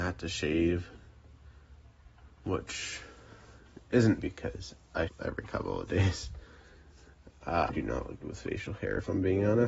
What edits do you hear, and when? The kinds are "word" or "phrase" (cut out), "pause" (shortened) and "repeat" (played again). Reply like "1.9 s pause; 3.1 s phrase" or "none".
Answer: 4.2 s word; 5.1 s word; 7.7 s word; 8.2 s word